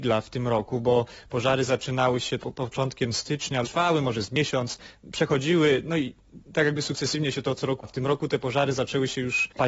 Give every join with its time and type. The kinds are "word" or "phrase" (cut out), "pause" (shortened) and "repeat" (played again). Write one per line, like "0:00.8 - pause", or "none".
0:01.7 - word
0:02.4 - word
0:03.6 - word
0:07.8 - word